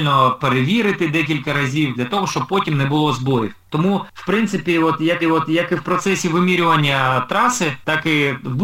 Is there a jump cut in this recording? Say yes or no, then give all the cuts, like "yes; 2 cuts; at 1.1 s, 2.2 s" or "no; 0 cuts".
yes; 1 cut; at 5.2 s